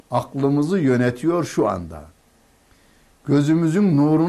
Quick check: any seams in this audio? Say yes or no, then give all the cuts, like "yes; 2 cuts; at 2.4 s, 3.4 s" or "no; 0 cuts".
no; 0 cuts